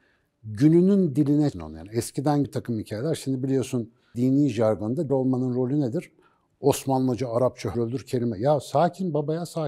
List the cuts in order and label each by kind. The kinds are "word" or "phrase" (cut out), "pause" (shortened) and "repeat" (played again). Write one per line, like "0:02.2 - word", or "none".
0:01.5 - word
0:02.4 - word
0:04.1 - word
0:05.1 - word
0:07.7 - word